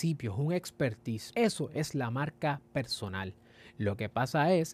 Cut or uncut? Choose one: uncut